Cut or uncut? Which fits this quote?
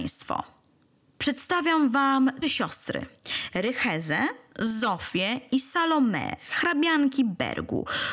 cut